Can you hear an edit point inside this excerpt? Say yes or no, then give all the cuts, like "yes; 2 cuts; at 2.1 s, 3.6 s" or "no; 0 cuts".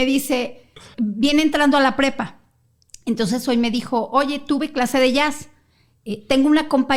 yes; 1 cut; at 0.9 s